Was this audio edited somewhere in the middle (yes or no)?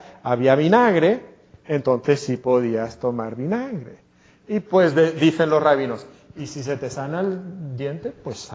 no